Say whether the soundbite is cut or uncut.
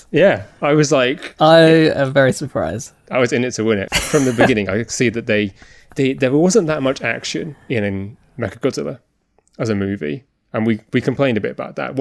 uncut